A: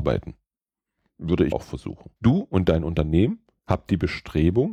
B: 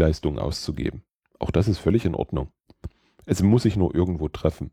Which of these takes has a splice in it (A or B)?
A